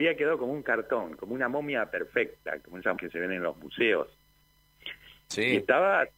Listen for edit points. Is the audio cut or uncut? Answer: cut